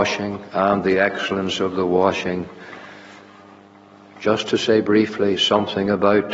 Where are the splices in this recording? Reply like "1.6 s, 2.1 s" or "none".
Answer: none